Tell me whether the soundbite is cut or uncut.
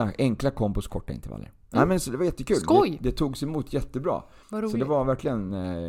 cut